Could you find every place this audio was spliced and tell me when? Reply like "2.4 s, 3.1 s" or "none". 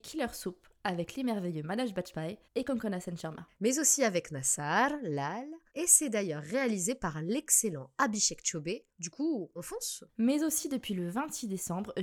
8.9 s, 10.1 s